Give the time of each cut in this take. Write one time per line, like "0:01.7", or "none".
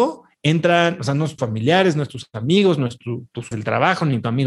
0:01.4
0:03.5

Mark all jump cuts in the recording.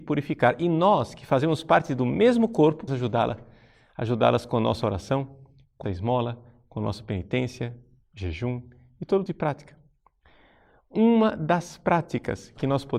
0:02.9
0:05.8
0:09.3

